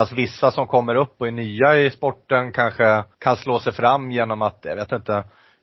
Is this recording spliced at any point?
yes; 1 cut; at 3.1 s

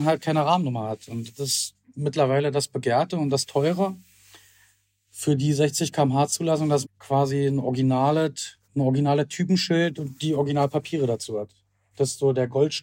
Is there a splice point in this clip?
yes; 2 cuts; at 6.8 s, 8.6 s

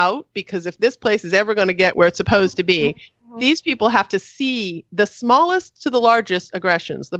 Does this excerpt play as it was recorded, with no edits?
yes; 0 cuts

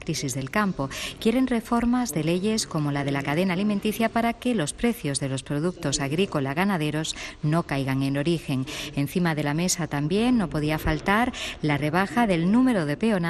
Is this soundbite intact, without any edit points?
yes; 0 cuts

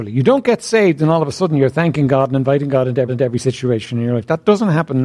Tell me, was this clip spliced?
yes; 1 cut; at 3.1 s

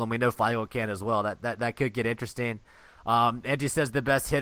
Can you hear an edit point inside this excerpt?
no; 0 cuts

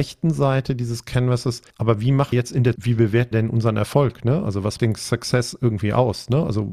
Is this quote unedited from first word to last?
no; 5 cuts; at 1.7 s, 2.3 s, 2.8 s, 3.3 s, 4.8 s

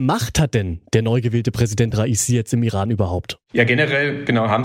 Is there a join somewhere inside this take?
no; 0 cuts

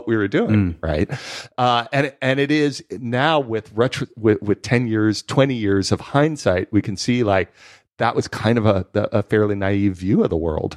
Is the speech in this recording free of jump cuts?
yes; 0 cuts

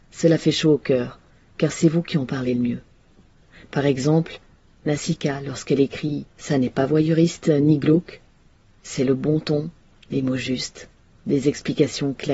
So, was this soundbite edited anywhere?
yes; 1 cut; at 6.3 s

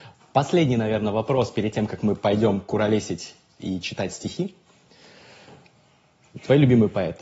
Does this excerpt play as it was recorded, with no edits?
yes; 0 cuts

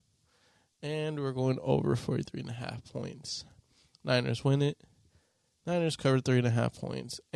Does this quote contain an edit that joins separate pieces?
no; 0 cuts

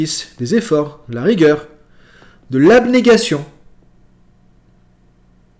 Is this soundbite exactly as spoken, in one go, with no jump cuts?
yes; 0 cuts

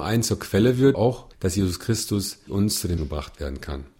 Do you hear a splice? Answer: yes; 4 cuts; at 0.9 s, 1.3 s, 2.5 s, 3.0 s

